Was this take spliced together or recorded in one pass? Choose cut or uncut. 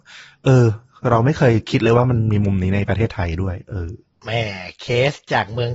uncut